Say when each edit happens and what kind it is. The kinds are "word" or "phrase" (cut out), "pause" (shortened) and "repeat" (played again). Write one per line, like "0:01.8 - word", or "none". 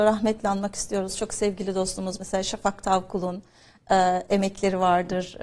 none